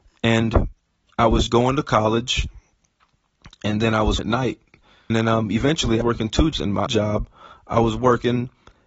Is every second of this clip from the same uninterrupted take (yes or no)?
no